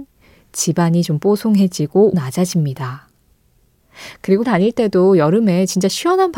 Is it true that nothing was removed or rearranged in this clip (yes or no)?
no